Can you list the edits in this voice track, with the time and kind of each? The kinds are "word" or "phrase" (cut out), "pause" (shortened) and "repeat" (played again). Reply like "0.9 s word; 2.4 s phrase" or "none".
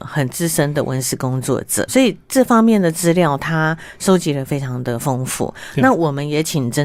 1.9 s word